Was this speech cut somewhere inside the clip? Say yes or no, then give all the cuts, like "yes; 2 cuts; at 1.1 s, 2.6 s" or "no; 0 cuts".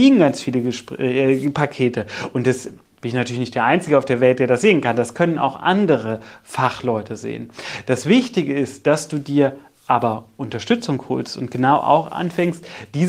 no; 0 cuts